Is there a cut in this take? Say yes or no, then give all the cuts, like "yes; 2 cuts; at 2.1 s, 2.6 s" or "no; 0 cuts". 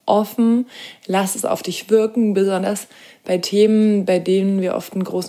no; 0 cuts